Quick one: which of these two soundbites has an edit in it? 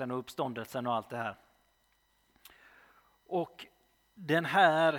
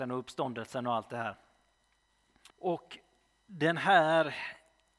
second; 1 cut; at 2.5 s

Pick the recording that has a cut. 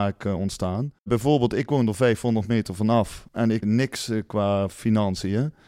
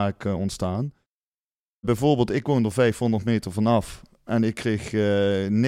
first; 3 cuts; at 1.0 s, 3.3 s, 3.6 s

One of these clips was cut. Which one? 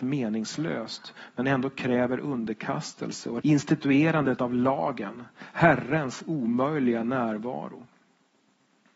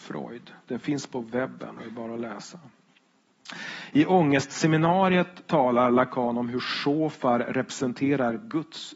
first; 1 cut; at 3.4 s

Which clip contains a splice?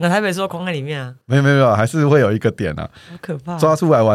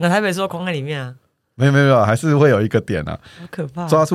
first; 1 cut; at 1.2 s

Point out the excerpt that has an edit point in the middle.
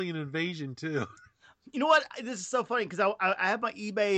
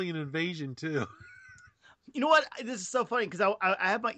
first; 1 cut; at 1.2 s

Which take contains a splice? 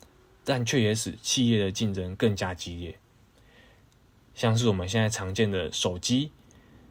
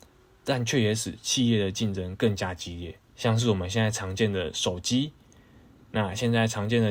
second; 1 cut; at 3.1 s

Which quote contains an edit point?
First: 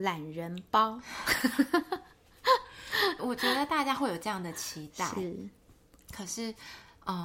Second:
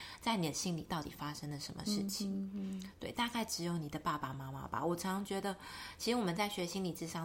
first; 1 cut; at 3.2 s

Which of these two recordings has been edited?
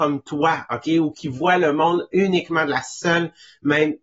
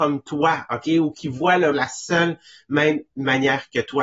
second; 1 cut; at 1.7 s

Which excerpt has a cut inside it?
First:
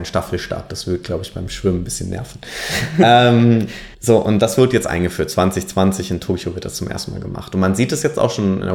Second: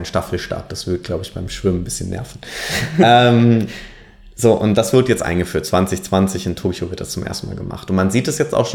first; 1 cut; at 3.9 s

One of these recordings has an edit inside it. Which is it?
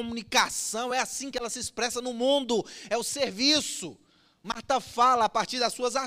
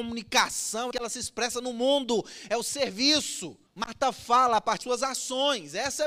second; 3 cuts; at 0.9 s, 3.7 s, 4.8 s

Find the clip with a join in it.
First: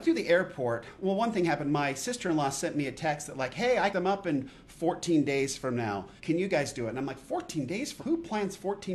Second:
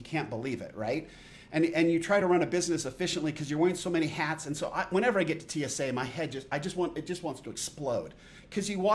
first; 3 cuts; at 3.9 s, 6.2 s, 8.0 s

